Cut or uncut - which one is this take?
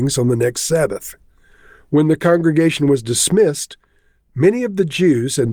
uncut